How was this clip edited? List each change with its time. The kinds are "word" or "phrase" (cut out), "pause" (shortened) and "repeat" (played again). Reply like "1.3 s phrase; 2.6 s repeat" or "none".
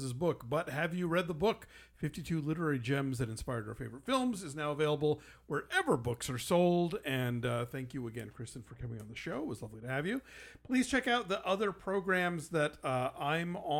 none